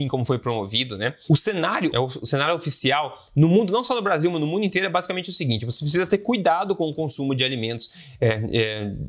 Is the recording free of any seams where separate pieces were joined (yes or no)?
no